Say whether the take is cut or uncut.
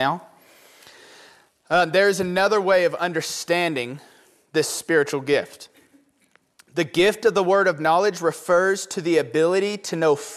uncut